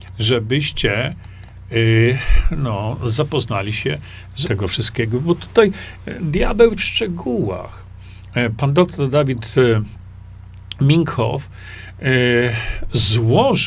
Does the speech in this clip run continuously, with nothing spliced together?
no; 2 cuts; at 4.4 s, 6.8 s

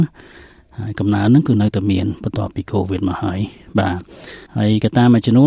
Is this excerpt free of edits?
no; 1 cut; at 4.5 s

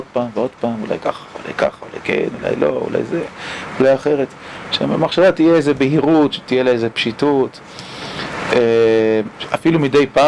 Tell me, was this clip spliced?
no; 0 cuts

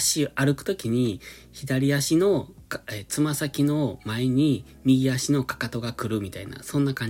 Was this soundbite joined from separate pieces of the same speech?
no; 0 cuts

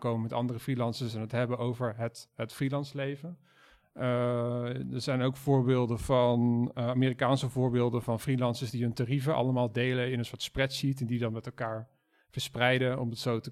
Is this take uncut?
yes; 0 cuts

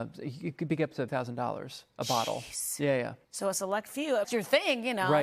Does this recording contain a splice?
yes; 3 cuts; at 1.1 s, 3.2 s, 4.2 s

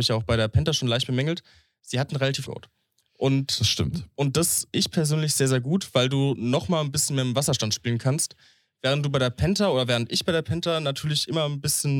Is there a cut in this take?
yes; 2 cuts; at 2.4 s, 4.7 s

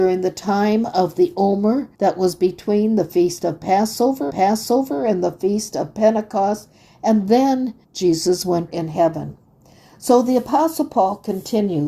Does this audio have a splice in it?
yes; 4 cuts; at 1.9 s, 4.3 s, 7.8 s, 8.7 s

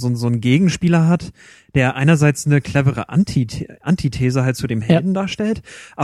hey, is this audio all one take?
yes; 0 cuts

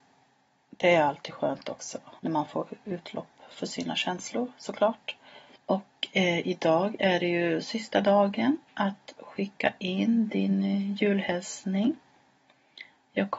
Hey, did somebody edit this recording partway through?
yes; 3 cuts; at 2.2 s, 5.5 s, 8.6 s

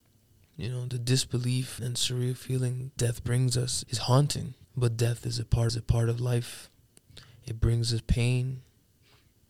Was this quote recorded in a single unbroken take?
no; 5 cuts; at 1.8 s, 3.0 s, 3.8 s, 4.6 s, 5.7 s

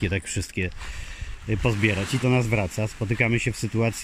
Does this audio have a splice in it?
yes; 1 cut; at 2.2 s

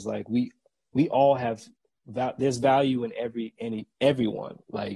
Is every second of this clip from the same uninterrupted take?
yes; 0 cuts

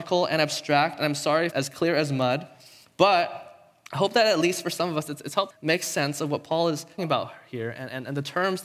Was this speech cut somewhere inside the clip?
yes; 4 cuts; at 1.5 s, 3.9 s, 5.5 s, 7.0 s

